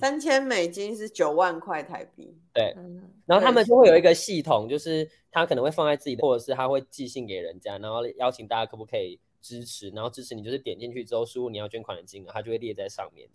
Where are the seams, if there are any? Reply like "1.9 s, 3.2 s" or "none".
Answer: 3.2 s, 6.2 s